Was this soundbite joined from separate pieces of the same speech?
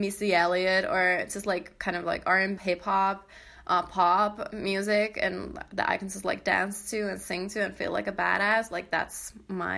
yes; 1 cut; at 2.6 s

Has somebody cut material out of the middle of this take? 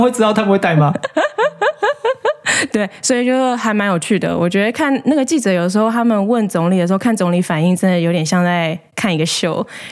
no; 0 cuts

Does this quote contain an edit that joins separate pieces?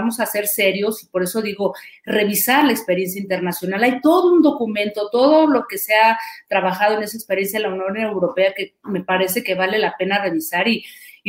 no; 0 cuts

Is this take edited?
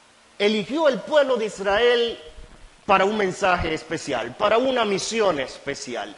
no; 0 cuts

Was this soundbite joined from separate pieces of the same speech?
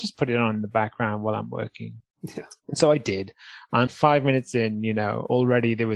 yes; 1 cut; at 3.9 s

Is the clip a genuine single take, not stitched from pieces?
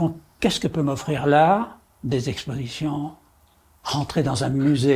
yes; 0 cuts

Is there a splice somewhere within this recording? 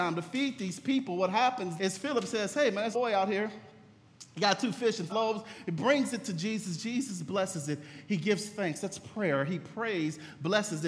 yes; 3 cuts; at 1.8 s, 2.9 s, 5.1 s

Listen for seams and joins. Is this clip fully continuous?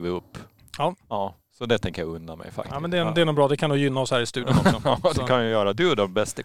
yes; 0 cuts

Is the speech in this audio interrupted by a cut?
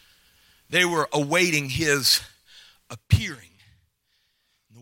no; 0 cuts

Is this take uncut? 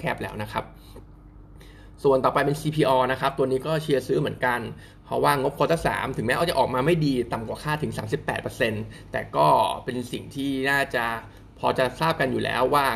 yes; 0 cuts

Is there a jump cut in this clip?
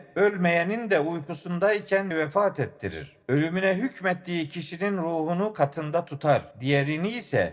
yes; 3 cuts; at 2.1 s, 3.2 s, 6.5 s

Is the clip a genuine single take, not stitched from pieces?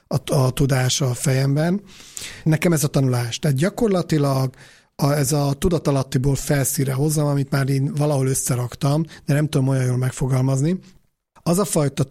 yes; 0 cuts

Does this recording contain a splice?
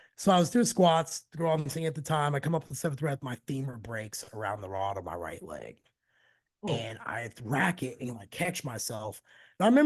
no; 0 cuts

